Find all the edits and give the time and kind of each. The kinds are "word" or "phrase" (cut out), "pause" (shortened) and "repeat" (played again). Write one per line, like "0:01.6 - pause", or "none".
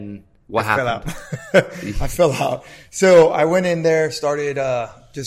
none